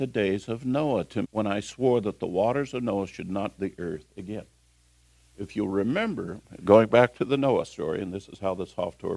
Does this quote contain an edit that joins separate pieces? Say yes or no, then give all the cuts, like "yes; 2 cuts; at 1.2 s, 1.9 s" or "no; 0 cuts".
yes; 2 cuts; at 1.2 s, 3.6 s